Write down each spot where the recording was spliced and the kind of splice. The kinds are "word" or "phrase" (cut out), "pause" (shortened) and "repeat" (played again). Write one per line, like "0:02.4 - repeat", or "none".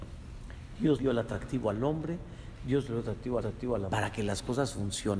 0:01.0 - word
0:03.4 - repeat
0:03.9 - word